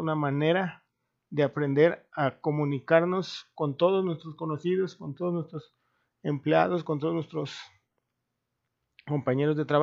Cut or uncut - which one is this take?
uncut